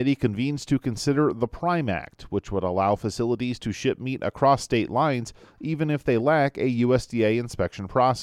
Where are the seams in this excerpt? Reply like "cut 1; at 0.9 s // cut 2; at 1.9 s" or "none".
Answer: none